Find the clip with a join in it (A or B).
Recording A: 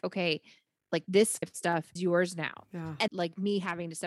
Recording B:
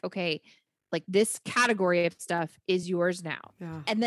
A